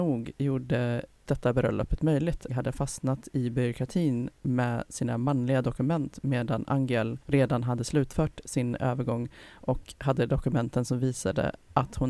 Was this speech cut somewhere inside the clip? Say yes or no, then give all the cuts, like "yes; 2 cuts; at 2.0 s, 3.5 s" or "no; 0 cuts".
yes; 3 cuts; at 1.3 s, 2.5 s, 7.2 s